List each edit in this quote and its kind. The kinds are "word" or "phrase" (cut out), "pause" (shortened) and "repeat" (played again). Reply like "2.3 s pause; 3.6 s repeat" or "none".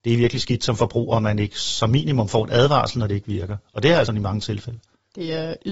4.1 s word